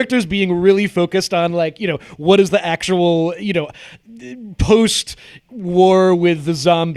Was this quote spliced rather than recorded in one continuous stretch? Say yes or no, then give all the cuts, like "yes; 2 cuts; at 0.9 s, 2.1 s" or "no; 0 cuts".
no; 0 cuts